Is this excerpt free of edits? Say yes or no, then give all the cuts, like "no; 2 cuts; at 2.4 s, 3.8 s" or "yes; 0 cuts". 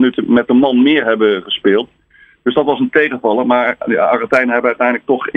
yes; 0 cuts